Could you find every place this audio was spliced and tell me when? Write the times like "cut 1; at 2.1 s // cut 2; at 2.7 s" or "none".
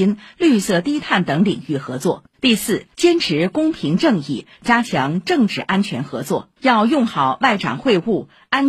cut 1; at 2.3 s // cut 2; at 2.9 s // cut 3; at 6.6 s

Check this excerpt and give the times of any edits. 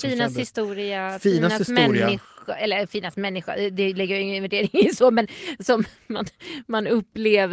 none

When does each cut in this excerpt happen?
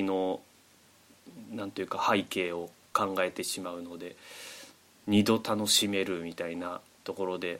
cut 1; at 2.8 s

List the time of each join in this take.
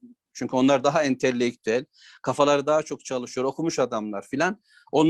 none

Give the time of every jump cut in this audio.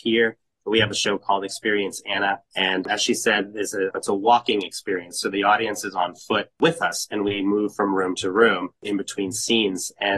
cut 1; at 2.5 s // cut 2; at 3.9 s // cut 3; at 6.5 s // cut 4; at 8.8 s

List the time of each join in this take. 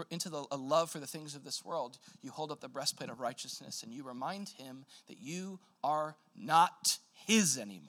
none

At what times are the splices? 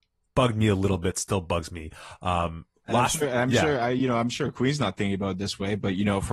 cut 1; at 2.8 s

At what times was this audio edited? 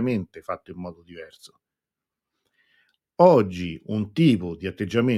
none

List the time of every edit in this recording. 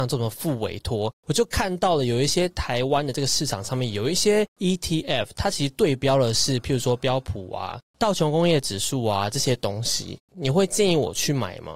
none

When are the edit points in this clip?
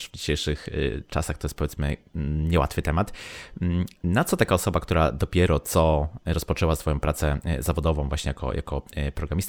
none

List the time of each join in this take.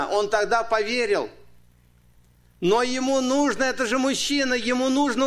none

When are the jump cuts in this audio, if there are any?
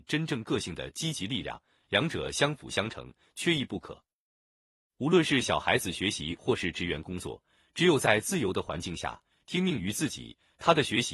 none

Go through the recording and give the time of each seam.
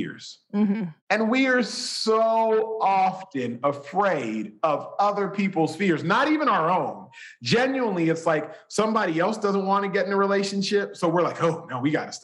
cut 1; at 1.0 s

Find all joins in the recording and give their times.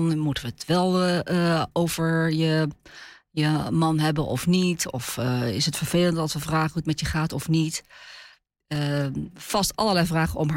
none

